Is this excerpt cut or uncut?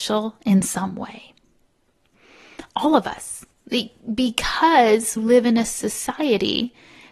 cut